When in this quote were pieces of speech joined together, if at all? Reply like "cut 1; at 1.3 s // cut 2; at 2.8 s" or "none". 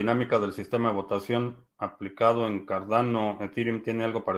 none